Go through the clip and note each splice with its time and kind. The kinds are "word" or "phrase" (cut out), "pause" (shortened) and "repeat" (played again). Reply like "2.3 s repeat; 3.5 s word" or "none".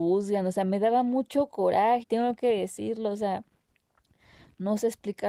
2.0 s word